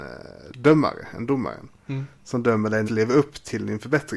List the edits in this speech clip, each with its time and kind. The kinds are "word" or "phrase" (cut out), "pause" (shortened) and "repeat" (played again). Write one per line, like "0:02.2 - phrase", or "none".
0:02.9 - phrase

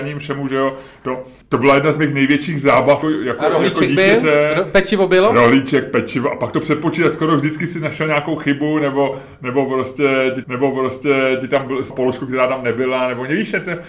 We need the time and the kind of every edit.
0:03.0 - word
0:10.4 - repeat
0:11.9 - phrase

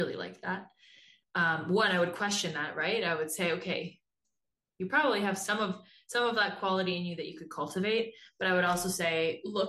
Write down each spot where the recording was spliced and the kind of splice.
none

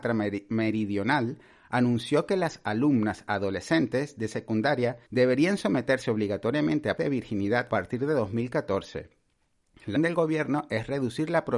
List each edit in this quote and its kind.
0:05.1 - pause
0:07.0 - word
0:07.7 - phrase
0:10.0 - word

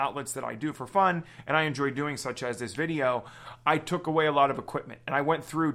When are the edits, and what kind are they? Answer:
none

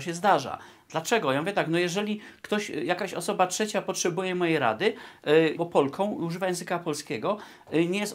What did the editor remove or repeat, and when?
0:05.6 - phrase

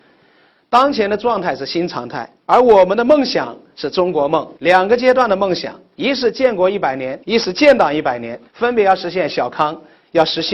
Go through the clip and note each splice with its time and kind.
0:04.6 - pause
0:07.2 - pause
0:08.5 - pause

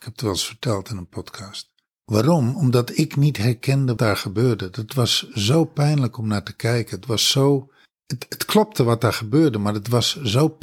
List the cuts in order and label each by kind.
0:04.0 - word

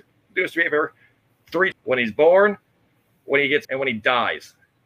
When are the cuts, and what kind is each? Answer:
0:01.7 - word
0:03.6 - word

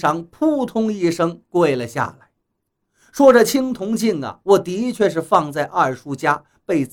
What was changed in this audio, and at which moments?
none

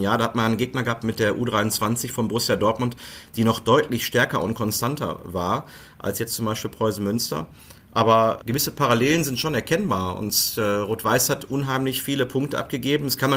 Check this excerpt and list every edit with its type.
0:08.4 - word

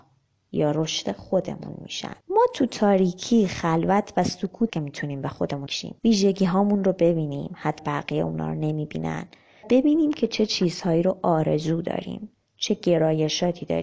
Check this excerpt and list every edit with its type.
0:02.2 - pause
0:04.7 - word
0:05.7 - word
0:06.0 - pause
0:07.8 - word
0:09.6 - word

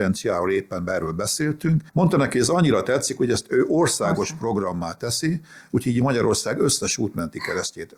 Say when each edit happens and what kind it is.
0:01.9 - pause

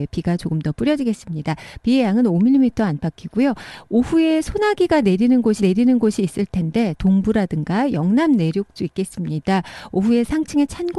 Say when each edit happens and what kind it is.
0:05.6 - repeat
0:07.0 - word
0:08.8 - phrase

